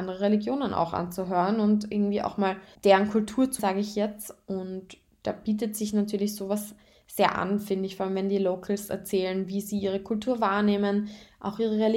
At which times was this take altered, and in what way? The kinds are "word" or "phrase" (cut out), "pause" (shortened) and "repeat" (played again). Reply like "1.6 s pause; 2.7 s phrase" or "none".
2.7 s pause; 3.6 s word